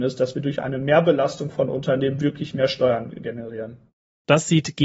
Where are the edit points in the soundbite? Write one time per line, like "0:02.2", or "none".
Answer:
none